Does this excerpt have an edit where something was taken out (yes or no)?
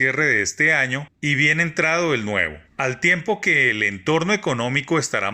yes